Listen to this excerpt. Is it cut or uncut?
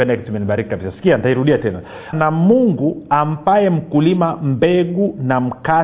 cut